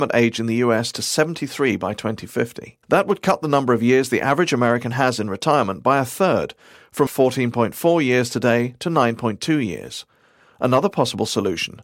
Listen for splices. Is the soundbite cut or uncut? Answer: cut